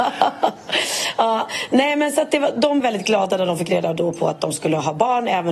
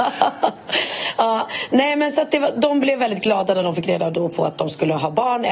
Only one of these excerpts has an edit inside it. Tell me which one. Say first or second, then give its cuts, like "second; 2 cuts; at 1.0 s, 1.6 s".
first; 1 cut; at 2.8 s